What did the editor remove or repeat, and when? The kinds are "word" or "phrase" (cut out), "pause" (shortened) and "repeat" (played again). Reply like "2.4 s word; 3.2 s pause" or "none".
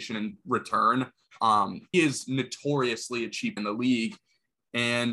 1.9 s word; 3.6 s word